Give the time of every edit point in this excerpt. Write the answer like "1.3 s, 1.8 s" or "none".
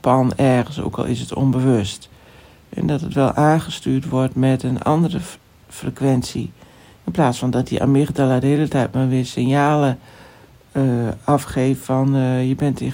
none